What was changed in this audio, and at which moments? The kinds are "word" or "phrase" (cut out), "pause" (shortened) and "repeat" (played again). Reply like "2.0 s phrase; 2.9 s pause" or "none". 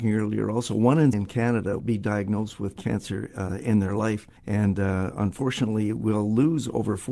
1.1 s phrase; 1.8 s word; 2.8 s word; 4.4 s pause